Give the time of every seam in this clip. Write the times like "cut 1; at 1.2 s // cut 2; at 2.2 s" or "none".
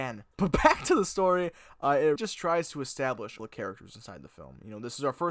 cut 1; at 2.2 s // cut 2; at 3.4 s